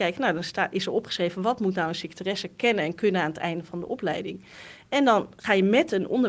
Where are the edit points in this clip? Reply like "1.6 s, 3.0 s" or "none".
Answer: none